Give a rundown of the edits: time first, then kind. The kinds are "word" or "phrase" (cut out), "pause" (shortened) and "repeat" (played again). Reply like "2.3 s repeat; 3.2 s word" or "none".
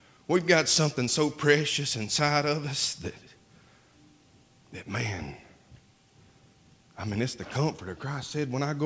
none